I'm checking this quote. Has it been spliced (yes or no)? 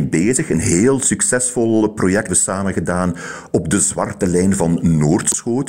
yes